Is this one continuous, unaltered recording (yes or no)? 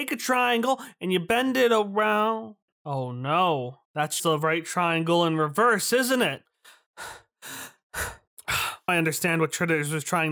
no